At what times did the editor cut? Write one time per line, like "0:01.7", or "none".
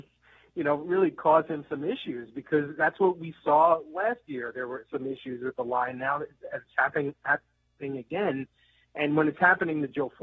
none